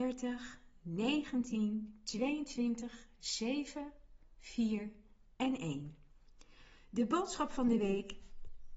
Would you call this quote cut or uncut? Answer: uncut